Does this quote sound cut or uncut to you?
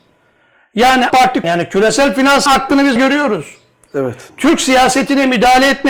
cut